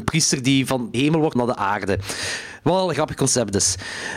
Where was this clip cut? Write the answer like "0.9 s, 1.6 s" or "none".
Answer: 0.9 s, 1.4 s, 2.9 s